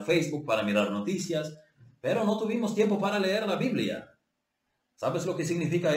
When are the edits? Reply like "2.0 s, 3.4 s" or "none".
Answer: none